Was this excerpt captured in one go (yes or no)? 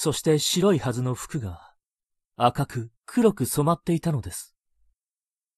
no